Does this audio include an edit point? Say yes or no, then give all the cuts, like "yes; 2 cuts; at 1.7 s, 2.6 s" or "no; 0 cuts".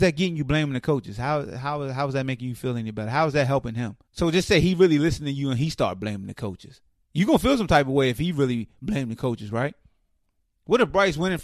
yes; 2 cuts; at 4.0 s, 6.9 s